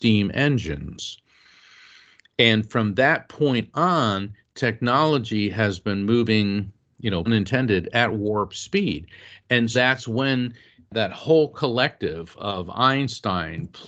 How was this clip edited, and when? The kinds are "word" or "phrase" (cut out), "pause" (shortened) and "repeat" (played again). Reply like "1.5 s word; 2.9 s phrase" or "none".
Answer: 7.3 s word; 9.7 s word

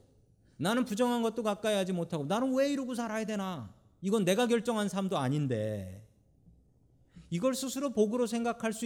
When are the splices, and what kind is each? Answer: none

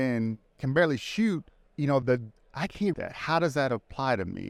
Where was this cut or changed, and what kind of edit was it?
1.5 s pause; 2.0 s word; 2.9 s word

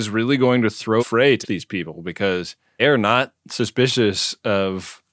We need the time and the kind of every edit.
1.0 s phrase; 1.4 s word; 2.8 s word

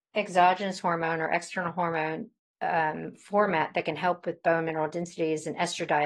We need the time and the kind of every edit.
2.4 s pause

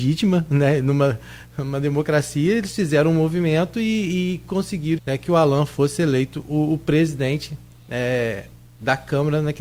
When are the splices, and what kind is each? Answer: 5.0 s word

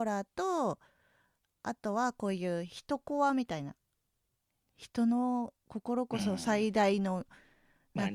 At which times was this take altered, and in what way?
none

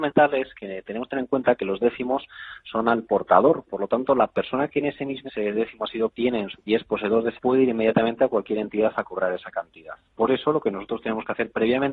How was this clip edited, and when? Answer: 5.3 s word; 6.1 s word; 6.6 s word; 7.3 s word

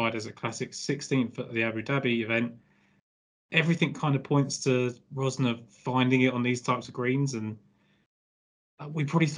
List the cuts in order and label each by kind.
none

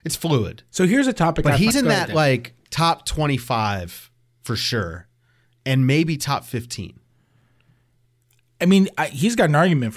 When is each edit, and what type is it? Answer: 1.7 s phrase

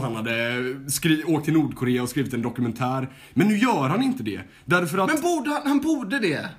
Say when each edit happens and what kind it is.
none

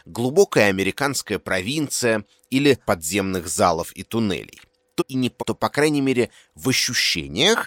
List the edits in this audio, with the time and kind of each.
2.9 s word; 5.0 s phrase; 5.4 s word

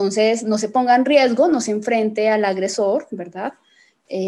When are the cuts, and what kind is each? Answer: none

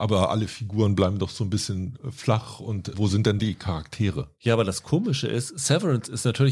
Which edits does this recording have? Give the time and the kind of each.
3.4 s word

